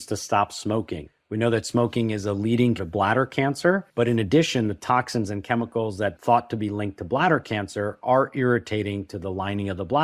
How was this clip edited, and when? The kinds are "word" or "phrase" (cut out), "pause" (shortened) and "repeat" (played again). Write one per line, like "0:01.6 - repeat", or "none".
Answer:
0:02.8 - word